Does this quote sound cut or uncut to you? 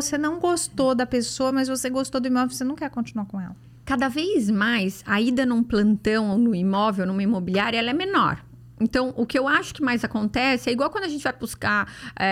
uncut